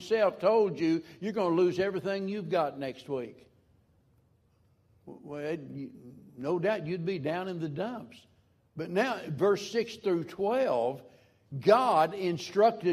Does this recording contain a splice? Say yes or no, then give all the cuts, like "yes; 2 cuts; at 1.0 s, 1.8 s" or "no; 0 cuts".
no; 0 cuts